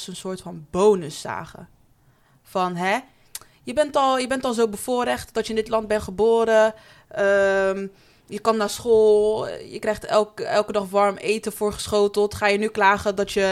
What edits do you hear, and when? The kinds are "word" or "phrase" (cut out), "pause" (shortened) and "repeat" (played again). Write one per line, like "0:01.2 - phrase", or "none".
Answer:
none